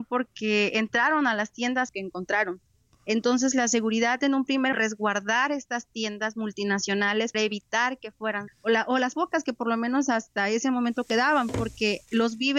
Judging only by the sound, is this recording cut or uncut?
cut